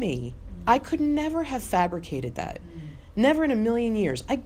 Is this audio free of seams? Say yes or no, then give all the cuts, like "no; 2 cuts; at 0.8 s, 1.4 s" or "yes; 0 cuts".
yes; 0 cuts